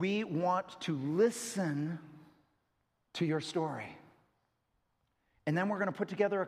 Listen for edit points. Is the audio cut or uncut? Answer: uncut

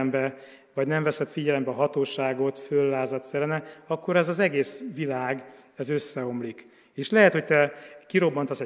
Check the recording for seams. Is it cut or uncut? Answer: uncut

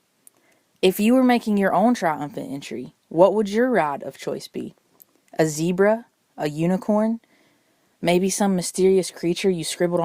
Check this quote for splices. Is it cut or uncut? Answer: uncut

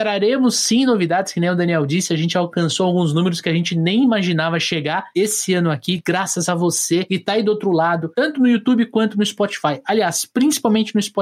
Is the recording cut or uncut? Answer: uncut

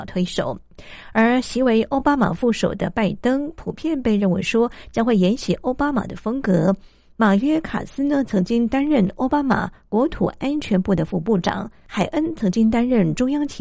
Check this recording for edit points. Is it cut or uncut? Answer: uncut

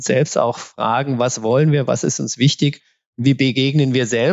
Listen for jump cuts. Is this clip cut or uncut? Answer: uncut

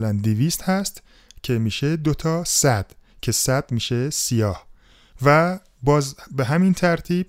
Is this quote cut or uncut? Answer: uncut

